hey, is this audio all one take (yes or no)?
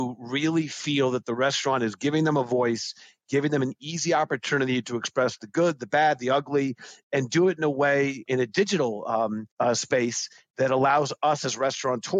no